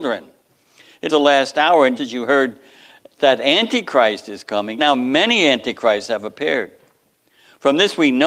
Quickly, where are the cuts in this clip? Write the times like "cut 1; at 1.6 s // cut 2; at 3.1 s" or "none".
cut 1; at 1.1 s // cut 2; at 2.0 s // cut 3; at 4.8 s